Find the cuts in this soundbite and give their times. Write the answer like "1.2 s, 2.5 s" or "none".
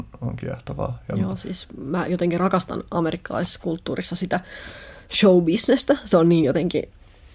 none